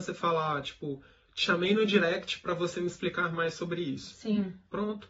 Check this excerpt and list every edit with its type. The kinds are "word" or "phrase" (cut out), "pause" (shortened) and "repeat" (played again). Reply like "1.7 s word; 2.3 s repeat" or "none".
none